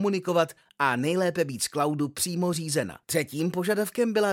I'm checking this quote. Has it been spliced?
yes; 1 cut; at 3.0 s

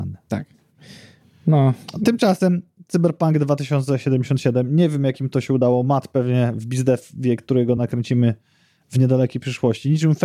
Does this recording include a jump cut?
no; 0 cuts

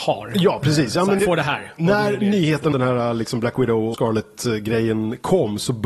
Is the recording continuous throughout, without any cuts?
no; 3 cuts; at 1.2 s, 2.7 s, 3.9 s

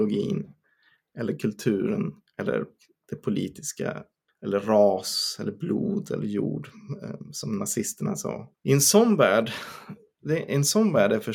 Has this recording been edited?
yes; 3 cuts; at 2.3 s, 4.3 s, 8.6 s

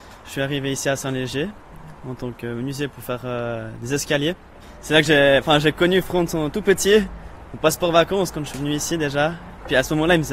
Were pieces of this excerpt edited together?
no; 0 cuts

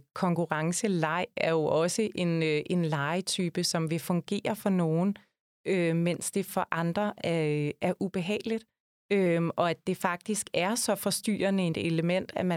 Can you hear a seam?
no; 0 cuts

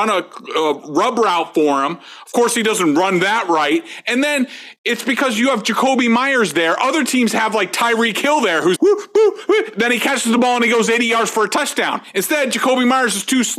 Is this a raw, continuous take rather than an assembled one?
no; 1 cut; at 8.8 s

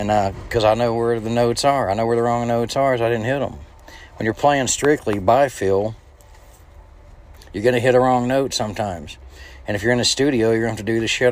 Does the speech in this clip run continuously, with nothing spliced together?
yes; 0 cuts

